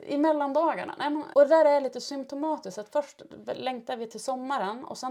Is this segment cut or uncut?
cut